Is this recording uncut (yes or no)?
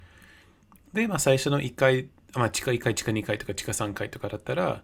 yes